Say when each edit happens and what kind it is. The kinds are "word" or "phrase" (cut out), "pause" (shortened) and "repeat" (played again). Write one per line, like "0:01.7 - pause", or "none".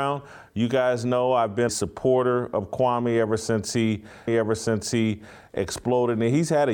0:01.7 - word
0:04.3 - repeat

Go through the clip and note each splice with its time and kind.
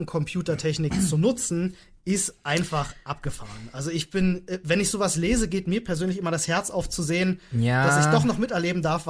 none

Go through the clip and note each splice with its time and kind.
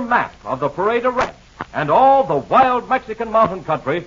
none

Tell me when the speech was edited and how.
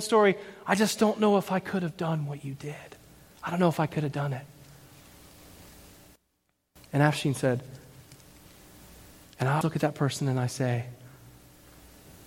0:09.6 - word

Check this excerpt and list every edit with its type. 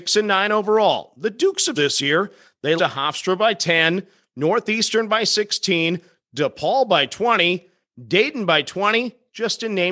0:01.7 - word
0:02.8 - word

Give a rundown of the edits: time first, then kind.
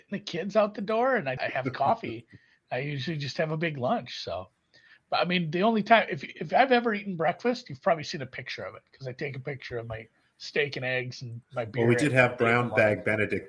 0:01.4 - word

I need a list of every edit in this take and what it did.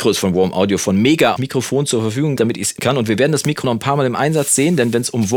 0:01.4 - phrase
0:02.4 - word
0:02.8 - phrase
0:03.6 - word

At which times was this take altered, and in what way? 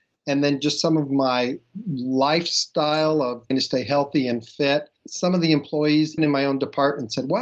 0:03.5 - word
0:05.0 - pause
0:06.2 - word

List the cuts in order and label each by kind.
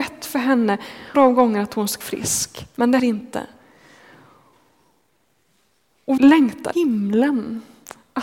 0:01.1 - word
0:02.0 - word
0:03.0 - word
0:06.2 - word
0:06.7 - word

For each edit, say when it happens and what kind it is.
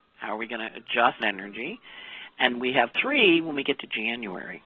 0:01.2 - word
0:02.5 - word
0:02.9 - word

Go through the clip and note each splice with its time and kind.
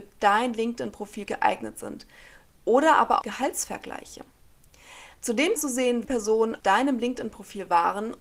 0:01.3 - word
0:03.2 - word
0:05.6 - word
0:06.0 - word
0:06.6 - word

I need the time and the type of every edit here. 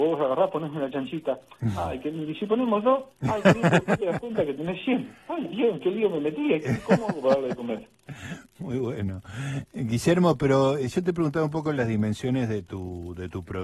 0:03.1 - pause

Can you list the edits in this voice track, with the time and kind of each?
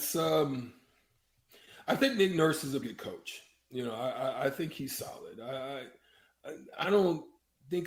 0:02.8 - word
0:06.8 - phrase

